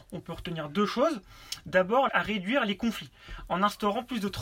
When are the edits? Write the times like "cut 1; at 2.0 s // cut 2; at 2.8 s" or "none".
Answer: cut 1; at 2.1 s